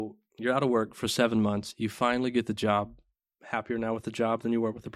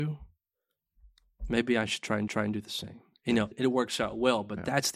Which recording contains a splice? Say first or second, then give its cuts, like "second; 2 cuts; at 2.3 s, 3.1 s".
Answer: second; 2 cuts; at 2.3 s, 3.5 s